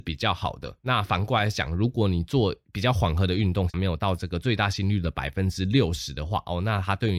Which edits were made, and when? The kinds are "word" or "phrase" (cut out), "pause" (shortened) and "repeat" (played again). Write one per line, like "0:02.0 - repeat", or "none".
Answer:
none